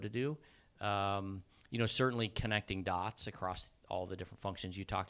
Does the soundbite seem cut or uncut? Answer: uncut